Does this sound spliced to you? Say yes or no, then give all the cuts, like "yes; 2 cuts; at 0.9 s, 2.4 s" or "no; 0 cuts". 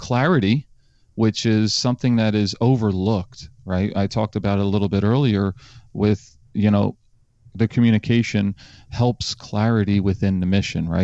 no; 0 cuts